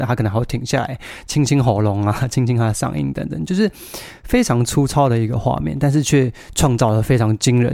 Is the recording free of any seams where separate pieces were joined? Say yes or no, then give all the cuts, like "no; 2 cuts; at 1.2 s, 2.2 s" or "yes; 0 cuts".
yes; 0 cuts